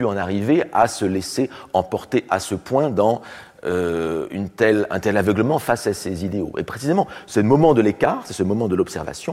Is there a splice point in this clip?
no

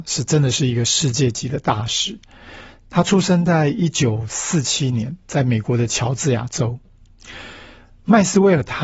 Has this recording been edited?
no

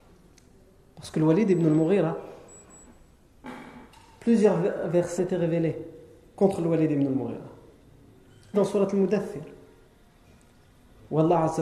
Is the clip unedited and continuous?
no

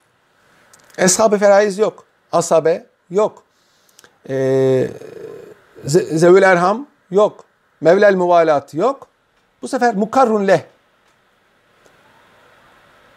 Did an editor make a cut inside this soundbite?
no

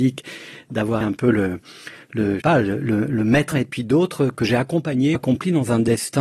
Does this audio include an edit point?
yes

